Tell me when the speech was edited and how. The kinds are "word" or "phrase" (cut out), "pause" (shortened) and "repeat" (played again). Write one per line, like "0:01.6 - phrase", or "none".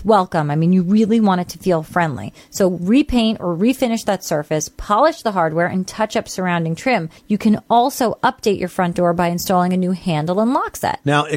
0:07.2 - pause